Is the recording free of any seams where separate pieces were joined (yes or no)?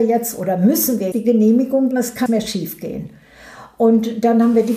no